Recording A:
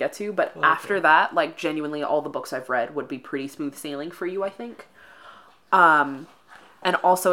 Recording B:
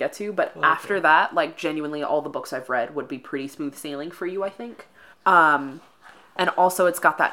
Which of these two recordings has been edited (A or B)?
B